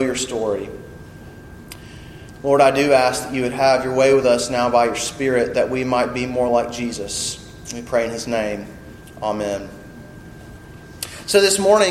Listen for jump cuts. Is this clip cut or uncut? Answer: uncut